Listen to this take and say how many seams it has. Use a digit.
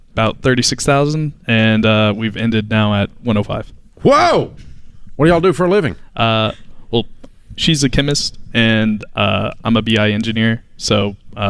0